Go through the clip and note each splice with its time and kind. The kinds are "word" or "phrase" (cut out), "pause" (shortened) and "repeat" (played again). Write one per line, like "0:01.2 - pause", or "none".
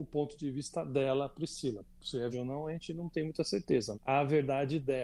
0:02.3 - word
0:03.9 - word